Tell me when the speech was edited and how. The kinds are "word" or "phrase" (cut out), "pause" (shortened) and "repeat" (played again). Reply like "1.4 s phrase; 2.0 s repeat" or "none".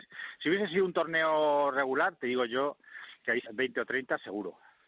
3.5 s word